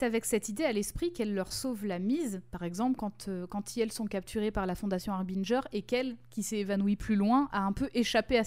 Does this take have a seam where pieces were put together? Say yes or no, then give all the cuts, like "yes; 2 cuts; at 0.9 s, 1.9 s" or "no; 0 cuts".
no; 0 cuts